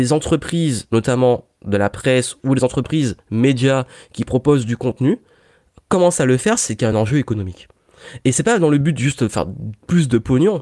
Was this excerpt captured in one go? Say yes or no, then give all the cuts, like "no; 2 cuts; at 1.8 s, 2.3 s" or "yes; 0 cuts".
yes; 0 cuts